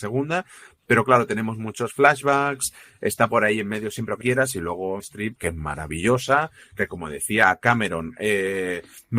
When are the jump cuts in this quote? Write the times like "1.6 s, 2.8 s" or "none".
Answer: 4.2 s, 5.0 s, 5.4 s